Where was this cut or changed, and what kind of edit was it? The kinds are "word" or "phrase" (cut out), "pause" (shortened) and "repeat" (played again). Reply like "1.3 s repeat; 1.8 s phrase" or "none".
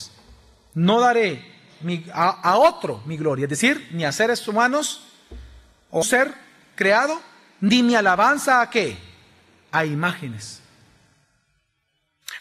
6.0 s phrase